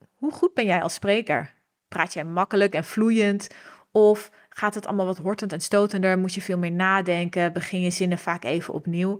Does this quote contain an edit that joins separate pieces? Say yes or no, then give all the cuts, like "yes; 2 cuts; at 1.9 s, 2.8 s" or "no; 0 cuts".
no; 0 cuts